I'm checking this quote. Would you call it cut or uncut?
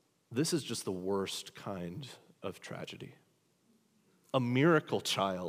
uncut